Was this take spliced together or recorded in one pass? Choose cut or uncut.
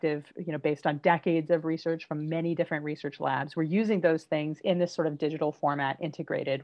uncut